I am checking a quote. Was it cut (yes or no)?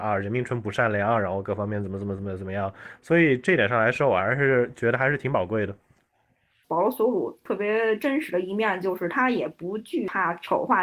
no